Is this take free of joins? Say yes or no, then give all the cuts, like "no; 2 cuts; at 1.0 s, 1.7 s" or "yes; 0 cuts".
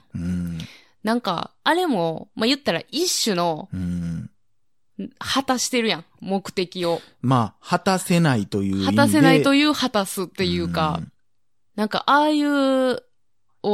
yes; 0 cuts